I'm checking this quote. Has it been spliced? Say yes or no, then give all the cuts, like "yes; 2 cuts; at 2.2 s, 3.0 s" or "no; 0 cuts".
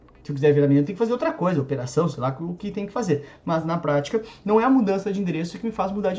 no; 0 cuts